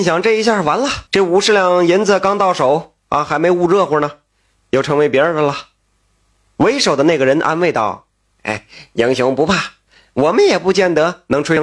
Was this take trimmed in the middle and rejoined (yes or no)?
yes